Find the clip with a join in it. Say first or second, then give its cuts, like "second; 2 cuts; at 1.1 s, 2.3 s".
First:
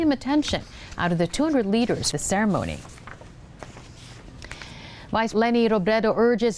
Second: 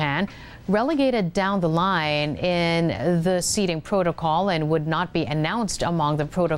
first; 2 cuts; at 2.1 s, 5.3 s